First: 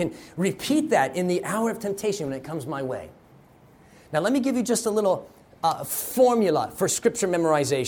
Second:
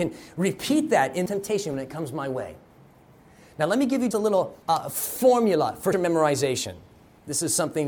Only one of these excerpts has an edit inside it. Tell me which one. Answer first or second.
second